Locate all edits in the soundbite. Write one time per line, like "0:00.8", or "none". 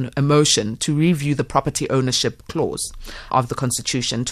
0:03.3